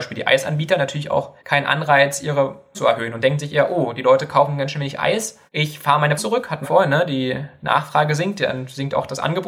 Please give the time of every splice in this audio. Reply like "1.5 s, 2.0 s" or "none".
1.4 s, 2.7 s, 5.5 s, 6.2 s, 6.6 s